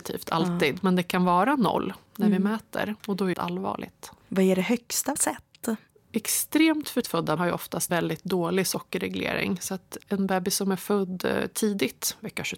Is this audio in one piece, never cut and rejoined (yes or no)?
no